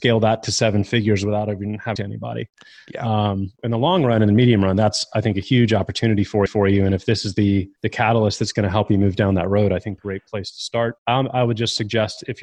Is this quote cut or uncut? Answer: cut